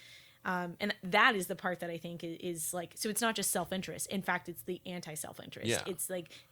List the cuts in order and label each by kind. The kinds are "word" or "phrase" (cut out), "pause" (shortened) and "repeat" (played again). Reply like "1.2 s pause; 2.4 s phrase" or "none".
none